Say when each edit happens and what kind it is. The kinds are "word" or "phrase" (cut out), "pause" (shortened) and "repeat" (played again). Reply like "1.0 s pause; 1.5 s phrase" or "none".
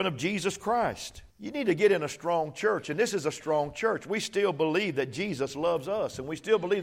1.3 s pause